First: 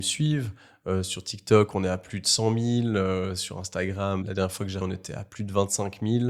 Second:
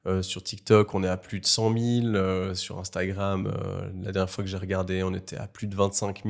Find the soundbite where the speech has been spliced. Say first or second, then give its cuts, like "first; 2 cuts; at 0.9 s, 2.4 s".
first; 2 cuts; at 4.2 s, 4.8 s